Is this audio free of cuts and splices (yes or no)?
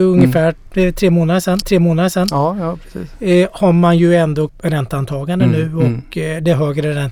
no